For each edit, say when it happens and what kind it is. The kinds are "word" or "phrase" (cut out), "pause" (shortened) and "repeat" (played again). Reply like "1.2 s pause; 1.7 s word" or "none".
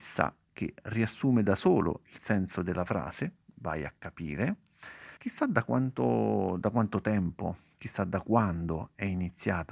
5.2 s pause